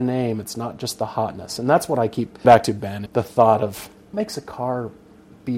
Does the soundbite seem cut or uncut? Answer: cut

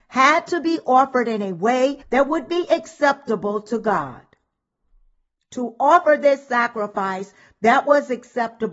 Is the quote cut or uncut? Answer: cut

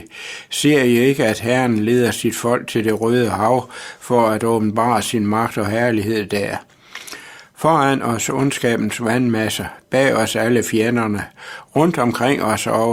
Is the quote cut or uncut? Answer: uncut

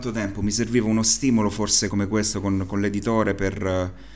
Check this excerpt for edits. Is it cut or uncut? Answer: cut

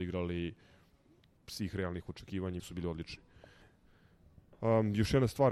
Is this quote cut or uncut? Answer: cut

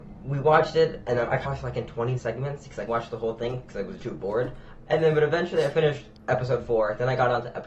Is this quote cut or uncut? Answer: cut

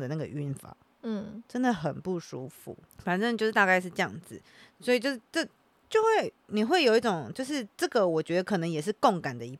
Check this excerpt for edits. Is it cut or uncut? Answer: uncut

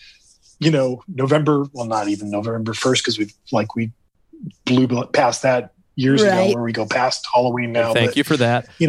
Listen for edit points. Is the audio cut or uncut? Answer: uncut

